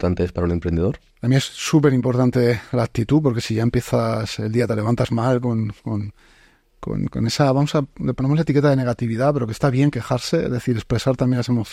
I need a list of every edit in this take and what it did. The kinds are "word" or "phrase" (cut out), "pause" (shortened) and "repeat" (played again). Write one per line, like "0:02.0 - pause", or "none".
0:01.1 - pause